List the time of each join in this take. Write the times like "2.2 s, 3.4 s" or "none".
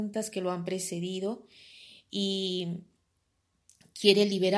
none